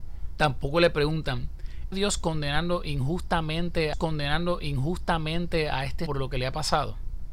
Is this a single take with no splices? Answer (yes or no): no